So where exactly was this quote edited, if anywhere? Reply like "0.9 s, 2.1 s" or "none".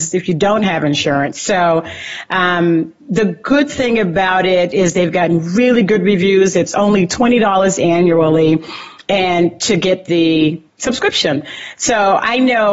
3.0 s, 10.7 s

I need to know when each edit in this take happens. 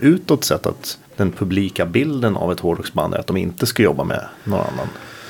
1.1 s

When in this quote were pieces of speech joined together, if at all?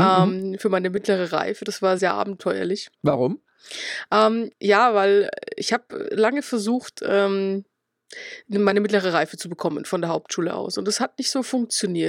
2.0 s, 2.9 s, 4.5 s

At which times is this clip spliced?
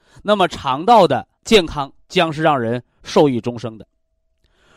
1.4 s, 2.0 s

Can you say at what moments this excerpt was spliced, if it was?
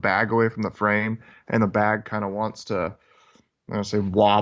none

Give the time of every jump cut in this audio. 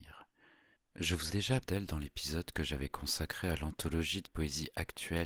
1.3 s, 1.6 s, 4.2 s

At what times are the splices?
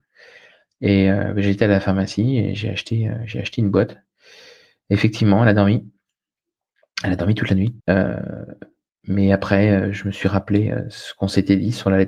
7.8 s

